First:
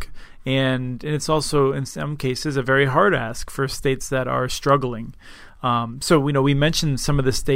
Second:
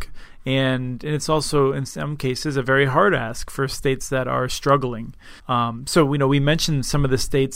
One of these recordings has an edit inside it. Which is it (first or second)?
second